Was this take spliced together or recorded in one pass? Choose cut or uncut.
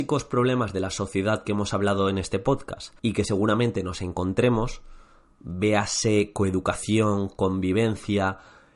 cut